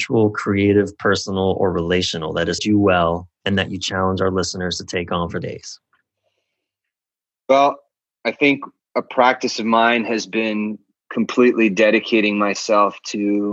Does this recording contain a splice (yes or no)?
yes